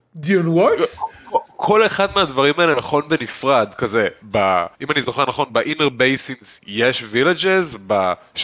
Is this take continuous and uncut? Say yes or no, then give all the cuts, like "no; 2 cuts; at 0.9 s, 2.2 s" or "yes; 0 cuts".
no; 1 cut; at 4.7 s